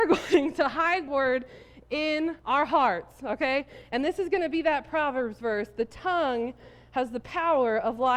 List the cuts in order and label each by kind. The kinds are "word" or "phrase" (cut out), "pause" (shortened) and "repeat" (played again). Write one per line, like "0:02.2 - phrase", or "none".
0:01.1 - word
0:02.4 - pause